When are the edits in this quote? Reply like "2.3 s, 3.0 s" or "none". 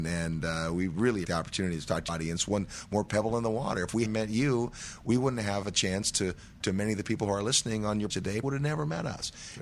1.2 s, 2.1 s, 4.1 s, 6.6 s, 8.1 s, 8.4 s